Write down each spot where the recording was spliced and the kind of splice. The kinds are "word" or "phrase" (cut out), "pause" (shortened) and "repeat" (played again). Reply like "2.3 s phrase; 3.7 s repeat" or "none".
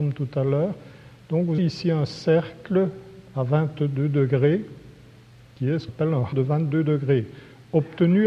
1.6 s word; 5.9 s word; 6.3 s word